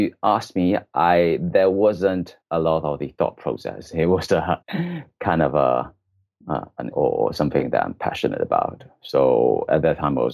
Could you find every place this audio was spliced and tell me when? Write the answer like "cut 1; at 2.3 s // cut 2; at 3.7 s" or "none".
cut 1; at 2.4 s // cut 2; at 4.3 s // cut 3; at 4.6 s // cut 4; at 6.9 s